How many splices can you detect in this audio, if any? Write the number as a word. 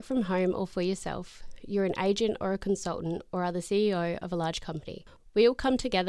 zero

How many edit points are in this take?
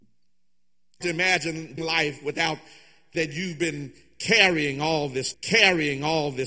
four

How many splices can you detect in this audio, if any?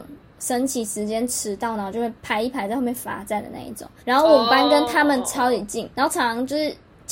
three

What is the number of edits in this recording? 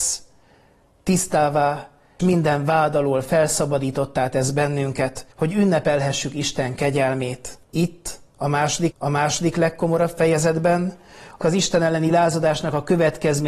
five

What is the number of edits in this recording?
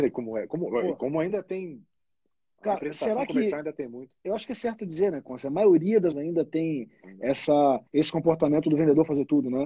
three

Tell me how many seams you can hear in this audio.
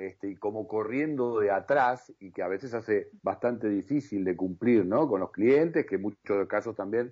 one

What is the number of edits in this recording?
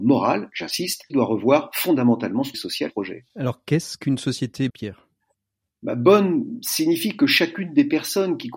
five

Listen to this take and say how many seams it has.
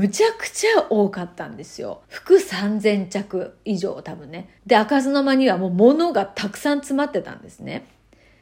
two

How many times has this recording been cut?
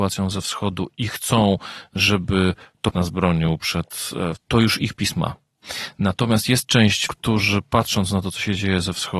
three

